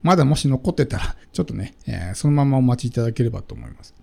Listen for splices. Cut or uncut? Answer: cut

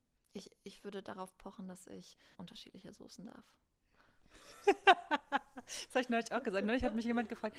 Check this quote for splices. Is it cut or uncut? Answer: cut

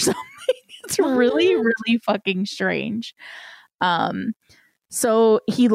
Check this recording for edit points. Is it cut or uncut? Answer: uncut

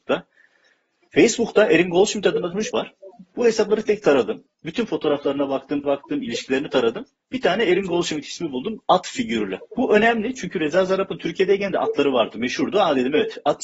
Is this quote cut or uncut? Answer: cut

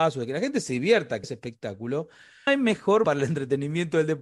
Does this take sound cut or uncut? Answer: cut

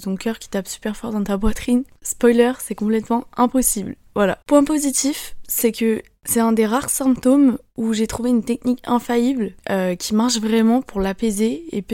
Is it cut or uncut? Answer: cut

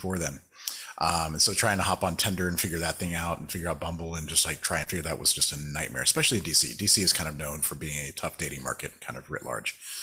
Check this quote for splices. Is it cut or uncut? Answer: uncut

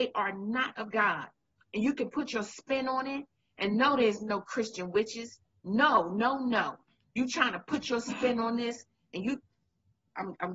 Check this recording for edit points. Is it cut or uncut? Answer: uncut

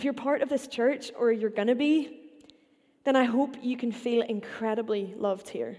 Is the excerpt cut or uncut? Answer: uncut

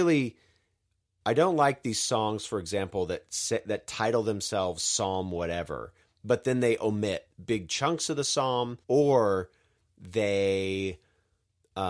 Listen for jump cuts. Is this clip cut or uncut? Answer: cut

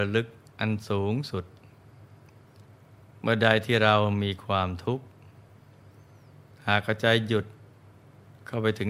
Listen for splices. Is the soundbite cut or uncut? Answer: uncut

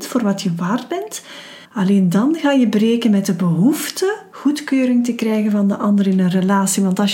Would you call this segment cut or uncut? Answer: cut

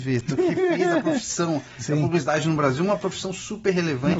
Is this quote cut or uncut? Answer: uncut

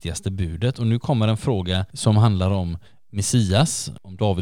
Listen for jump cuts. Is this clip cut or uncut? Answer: uncut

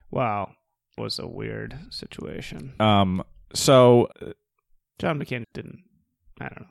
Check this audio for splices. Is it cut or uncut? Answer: cut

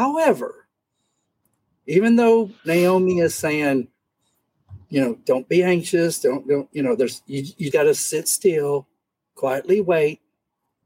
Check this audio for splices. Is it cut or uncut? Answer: cut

